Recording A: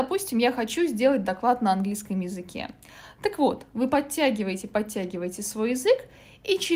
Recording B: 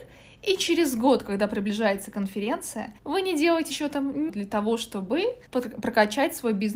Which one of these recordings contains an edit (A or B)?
B